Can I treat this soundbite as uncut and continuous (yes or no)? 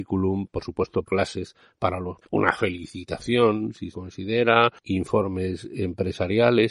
no